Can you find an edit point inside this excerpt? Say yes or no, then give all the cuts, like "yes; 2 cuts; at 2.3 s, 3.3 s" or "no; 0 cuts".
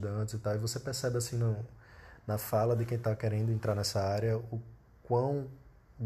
no; 0 cuts